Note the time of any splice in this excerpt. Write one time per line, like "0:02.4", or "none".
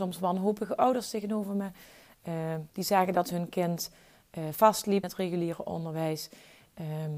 0:02.7
0:05.0